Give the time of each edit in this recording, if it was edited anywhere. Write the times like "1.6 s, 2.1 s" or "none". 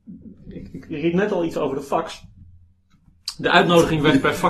none